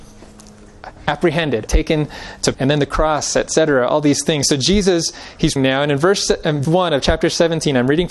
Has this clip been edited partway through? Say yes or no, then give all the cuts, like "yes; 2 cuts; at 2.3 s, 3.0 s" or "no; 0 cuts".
yes; 4 cuts; at 1.7 s, 2.5 s, 5.6 s, 6.6 s